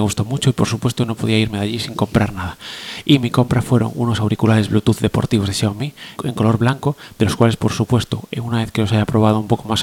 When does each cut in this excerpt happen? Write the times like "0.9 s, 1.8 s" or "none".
6.2 s